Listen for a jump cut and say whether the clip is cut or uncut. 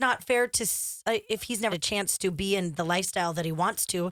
cut